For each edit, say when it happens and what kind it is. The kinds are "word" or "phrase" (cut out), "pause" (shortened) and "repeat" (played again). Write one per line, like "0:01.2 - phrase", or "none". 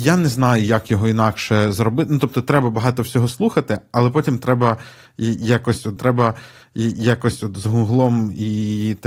0:06.0 - repeat